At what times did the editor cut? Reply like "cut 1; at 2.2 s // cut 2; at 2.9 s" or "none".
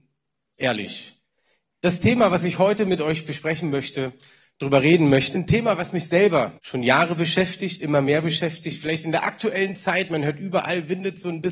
cut 1; at 5.3 s // cut 2; at 6.6 s